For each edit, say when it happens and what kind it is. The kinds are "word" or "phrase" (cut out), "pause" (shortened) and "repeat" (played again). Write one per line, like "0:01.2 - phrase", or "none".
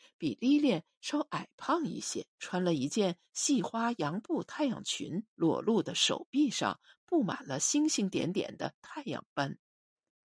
0:02.3 - pause
0:05.3 - pause